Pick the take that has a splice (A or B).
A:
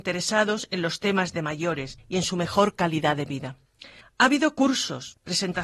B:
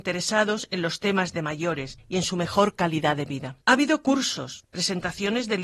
B